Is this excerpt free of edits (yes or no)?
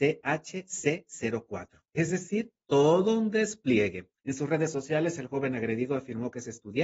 no